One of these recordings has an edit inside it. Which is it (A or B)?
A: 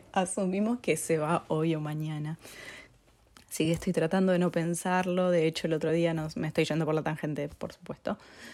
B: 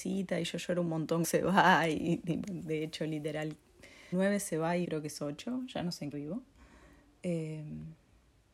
B